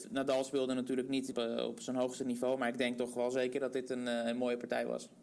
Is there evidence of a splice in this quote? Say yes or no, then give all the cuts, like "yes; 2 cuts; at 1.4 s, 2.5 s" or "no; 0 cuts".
yes; 1 cut; at 1.3 s